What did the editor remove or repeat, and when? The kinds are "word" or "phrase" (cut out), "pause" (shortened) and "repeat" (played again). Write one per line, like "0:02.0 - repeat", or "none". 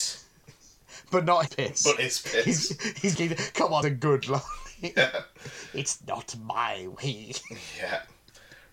0:01.5 - word
0:02.0 - word
0:03.2 - word
0:03.8 - phrase